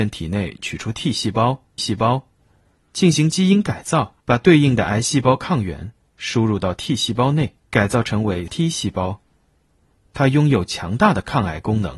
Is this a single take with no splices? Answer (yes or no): no